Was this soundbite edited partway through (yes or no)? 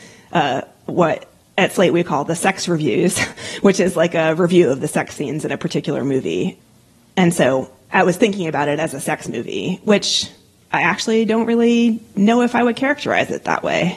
no